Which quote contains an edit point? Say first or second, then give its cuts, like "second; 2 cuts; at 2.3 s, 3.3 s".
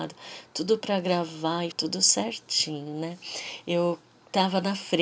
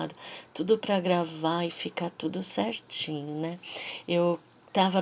first; 1 cut; at 1.7 s